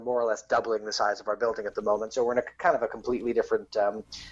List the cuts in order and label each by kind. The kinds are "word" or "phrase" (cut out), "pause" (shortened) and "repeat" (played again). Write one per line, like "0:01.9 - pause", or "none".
none